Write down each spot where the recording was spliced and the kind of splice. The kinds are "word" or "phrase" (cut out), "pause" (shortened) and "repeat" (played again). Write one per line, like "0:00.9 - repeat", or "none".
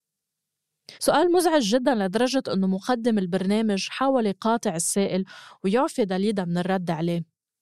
0:00.9 - pause